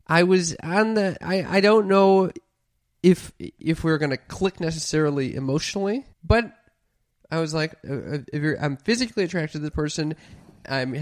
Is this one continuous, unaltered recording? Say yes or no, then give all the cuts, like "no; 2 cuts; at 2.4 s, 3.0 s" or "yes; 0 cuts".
no; 3 cuts; at 1.2 s, 6.1 s, 7.8 s